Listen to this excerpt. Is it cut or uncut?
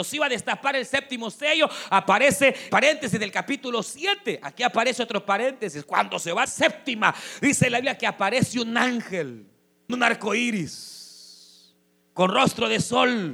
cut